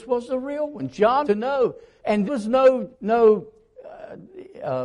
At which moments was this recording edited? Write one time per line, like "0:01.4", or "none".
0:01.2
0:02.3
0:02.9